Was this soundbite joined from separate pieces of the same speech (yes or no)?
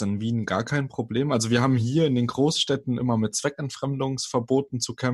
no